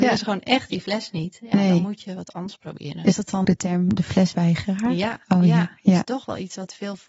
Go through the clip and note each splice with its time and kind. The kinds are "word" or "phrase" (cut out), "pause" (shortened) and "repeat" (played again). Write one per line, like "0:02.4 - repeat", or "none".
0:03.4 - word